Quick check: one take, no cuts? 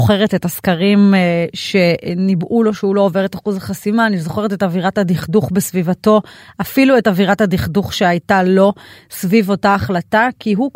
yes; 0 cuts

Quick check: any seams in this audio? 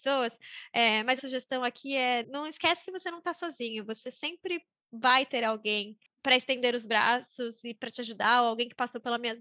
yes; 2 cuts; at 1.2 s, 2.2 s

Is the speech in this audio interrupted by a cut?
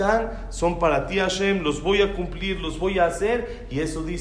no; 0 cuts

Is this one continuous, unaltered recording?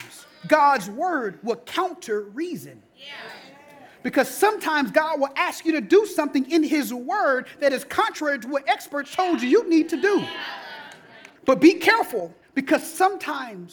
no; 2 cuts; at 11.4 s, 12.4 s

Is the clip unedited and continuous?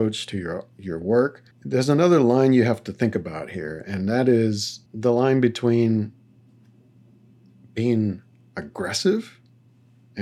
no; 2 cuts; at 1.5 s, 4.9 s

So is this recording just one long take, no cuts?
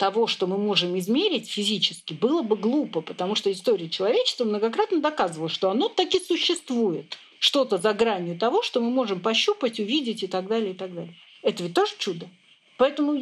yes; 0 cuts

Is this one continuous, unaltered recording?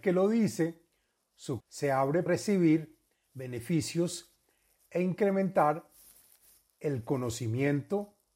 no; 2 cuts; at 1.6 s, 2.3 s

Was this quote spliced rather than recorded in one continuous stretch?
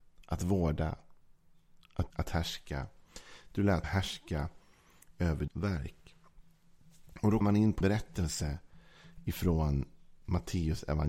yes; 5 cuts; at 2.1 s, 3.8 s, 5.5 s, 7.4 s, 7.8 s

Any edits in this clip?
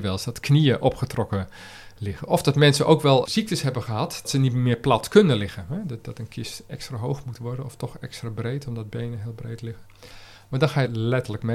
no; 0 cuts

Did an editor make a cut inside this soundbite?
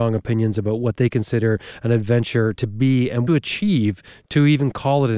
yes; 1 cut; at 3.3 s

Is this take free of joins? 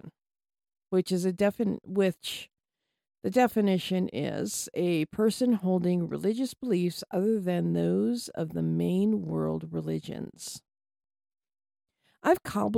yes; 0 cuts

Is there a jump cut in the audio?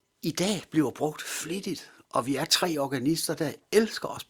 no; 0 cuts

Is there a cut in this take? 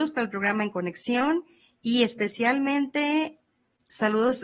no; 0 cuts

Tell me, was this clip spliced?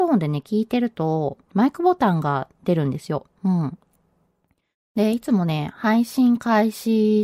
yes; 2 cuts; at 1.4 s, 3.4 s

